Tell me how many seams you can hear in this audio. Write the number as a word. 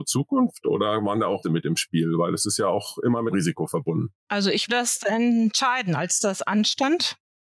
three